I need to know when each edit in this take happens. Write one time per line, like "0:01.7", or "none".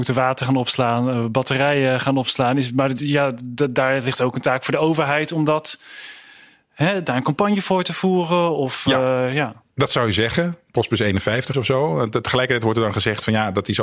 0:09.7
0:11.5